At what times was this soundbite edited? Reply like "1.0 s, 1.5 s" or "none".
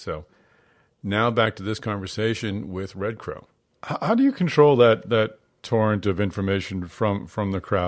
none